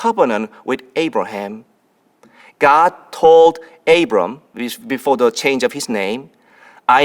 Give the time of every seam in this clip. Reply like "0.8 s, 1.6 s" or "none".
none